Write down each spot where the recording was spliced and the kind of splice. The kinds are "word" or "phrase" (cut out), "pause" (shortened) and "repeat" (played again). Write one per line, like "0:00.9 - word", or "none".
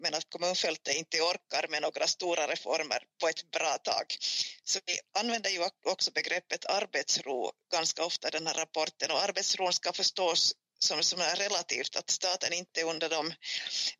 0:05.8 - pause